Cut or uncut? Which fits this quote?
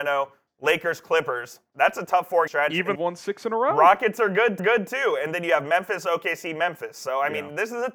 cut